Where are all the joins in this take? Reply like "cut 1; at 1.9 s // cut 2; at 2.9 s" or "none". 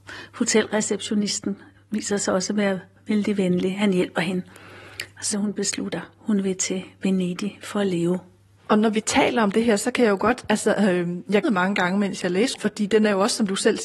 cut 1; at 5.3 s // cut 2; at 11.4 s // cut 3; at 12.6 s